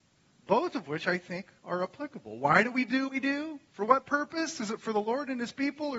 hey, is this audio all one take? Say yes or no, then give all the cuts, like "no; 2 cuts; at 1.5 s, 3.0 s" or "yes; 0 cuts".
no; 3 cuts; at 1.6 s, 3.1 s, 3.7 s